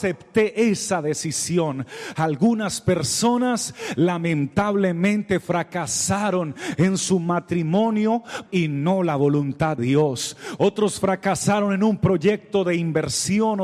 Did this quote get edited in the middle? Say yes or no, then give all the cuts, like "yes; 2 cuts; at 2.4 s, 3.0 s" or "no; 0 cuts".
yes; 2 cuts; at 8.5 s, 9.8 s